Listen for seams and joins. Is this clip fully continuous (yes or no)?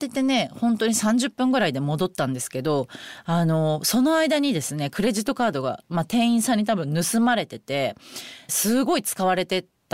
no